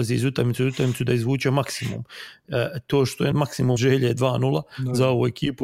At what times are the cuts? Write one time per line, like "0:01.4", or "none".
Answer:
0:03.3
0:03.8